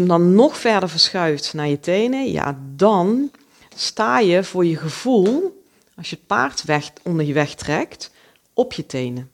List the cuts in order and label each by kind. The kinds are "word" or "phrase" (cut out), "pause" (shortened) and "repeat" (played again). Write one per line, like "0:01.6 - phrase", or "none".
none